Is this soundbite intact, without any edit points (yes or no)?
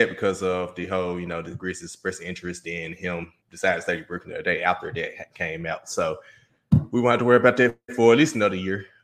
no